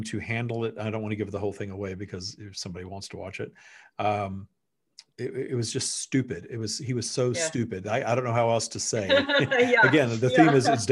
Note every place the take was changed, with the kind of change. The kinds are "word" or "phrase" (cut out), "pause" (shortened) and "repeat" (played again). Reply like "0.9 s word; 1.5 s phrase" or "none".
5.1 s pause